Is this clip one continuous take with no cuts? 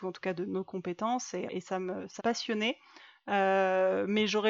no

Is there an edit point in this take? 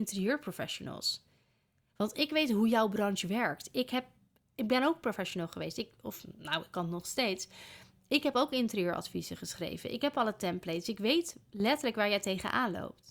no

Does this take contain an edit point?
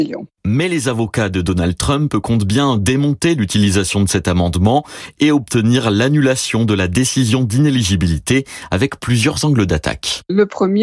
no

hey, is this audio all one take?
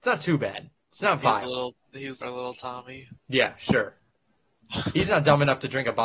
no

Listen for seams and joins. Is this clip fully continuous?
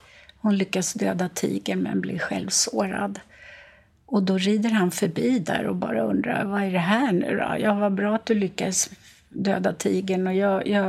yes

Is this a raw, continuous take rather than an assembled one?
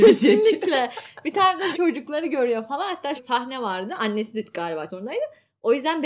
no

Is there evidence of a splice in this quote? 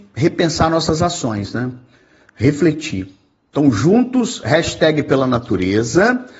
no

